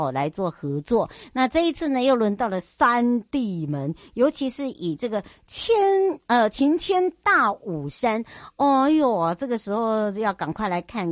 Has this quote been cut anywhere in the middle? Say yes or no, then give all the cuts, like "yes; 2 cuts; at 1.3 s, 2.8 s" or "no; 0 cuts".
no; 0 cuts